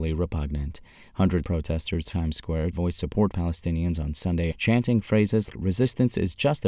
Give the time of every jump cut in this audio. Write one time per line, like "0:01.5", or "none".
0:01.4
0:02.1
0:02.7
0:03.3
0:04.5
0:05.5